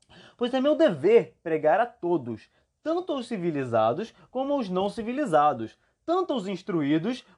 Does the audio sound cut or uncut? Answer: uncut